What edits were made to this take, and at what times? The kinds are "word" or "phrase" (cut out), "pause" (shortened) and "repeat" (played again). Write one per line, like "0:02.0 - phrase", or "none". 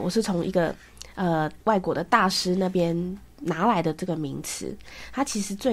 0:01.6 - pause